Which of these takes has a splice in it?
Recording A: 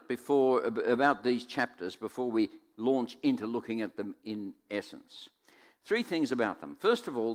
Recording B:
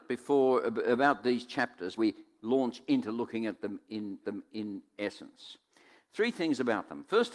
B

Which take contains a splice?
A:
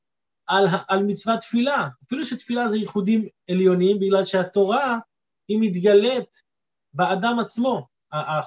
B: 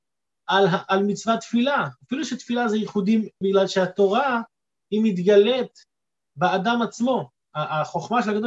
B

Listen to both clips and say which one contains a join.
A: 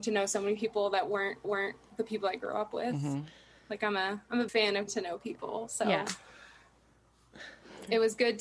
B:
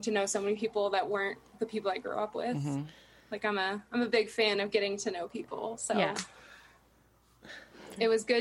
A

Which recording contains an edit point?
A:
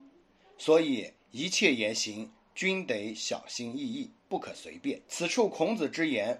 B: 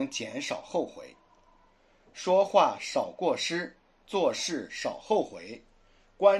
A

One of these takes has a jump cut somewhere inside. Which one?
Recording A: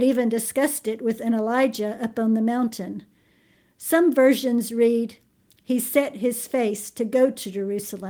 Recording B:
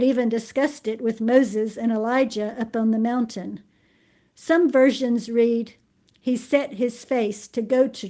A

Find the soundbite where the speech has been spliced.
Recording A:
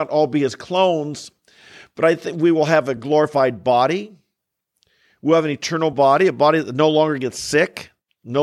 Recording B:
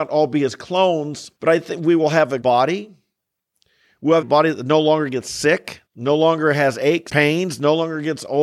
B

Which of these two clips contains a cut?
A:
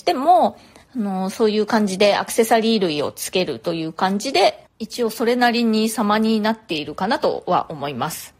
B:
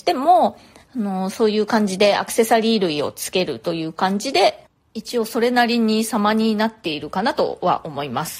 A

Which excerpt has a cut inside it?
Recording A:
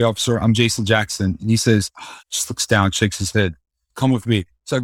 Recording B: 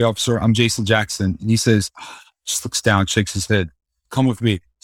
A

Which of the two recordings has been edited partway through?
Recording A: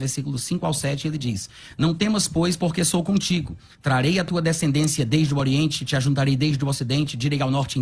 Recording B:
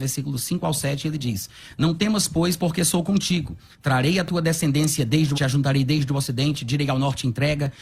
B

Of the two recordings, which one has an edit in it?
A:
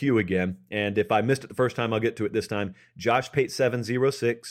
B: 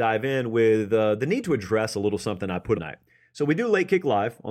B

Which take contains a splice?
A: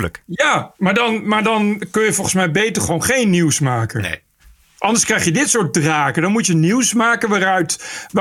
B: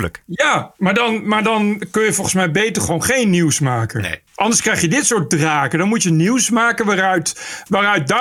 B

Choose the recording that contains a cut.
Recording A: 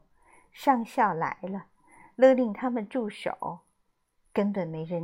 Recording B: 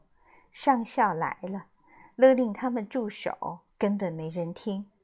B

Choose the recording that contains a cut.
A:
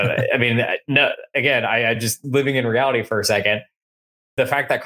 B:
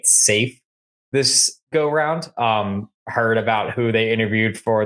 B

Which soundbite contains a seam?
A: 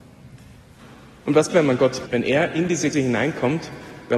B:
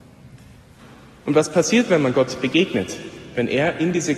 A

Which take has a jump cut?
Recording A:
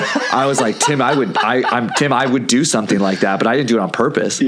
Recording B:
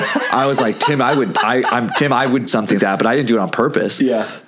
B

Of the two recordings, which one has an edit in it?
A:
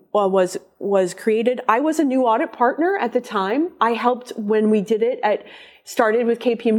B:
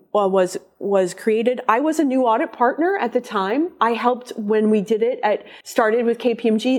B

